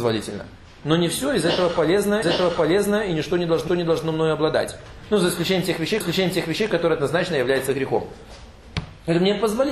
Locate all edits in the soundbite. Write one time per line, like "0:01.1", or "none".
0:02.2
0:03.7
0:06.0